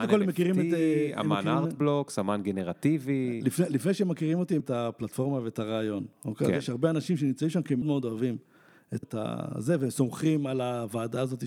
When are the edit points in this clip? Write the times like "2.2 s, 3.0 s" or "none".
4.6 s, 7.8 s, 9.0 s